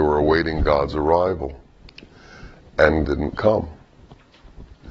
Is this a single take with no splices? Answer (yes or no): no